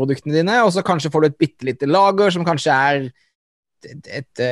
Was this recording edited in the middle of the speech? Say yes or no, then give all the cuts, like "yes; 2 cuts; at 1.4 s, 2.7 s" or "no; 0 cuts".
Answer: no; 0 cuts